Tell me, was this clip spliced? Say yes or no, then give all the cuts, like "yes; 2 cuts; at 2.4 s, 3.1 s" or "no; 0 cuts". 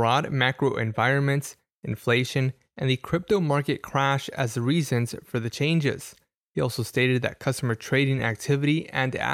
no; 0 cuts